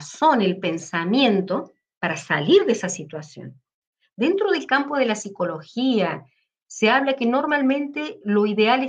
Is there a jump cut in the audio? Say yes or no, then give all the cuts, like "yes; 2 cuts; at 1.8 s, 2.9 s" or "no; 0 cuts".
no; 0 cuts